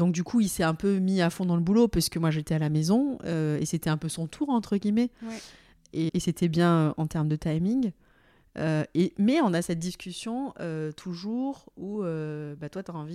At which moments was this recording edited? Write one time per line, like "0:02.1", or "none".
0:06.1